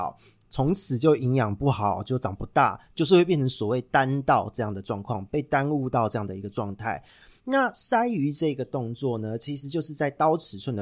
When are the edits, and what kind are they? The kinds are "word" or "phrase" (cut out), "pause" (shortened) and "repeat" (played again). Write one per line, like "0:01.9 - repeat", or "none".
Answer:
none